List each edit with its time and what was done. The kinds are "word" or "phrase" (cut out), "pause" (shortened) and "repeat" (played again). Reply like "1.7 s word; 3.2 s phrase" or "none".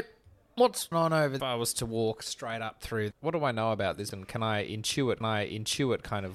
0.9 s phrase; 1.4 s phrase; 3.1 s word; 4.1 s word; 5.2 s repeat